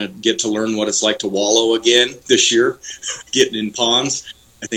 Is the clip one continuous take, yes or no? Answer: no